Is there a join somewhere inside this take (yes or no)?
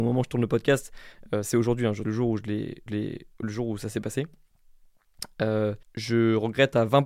yes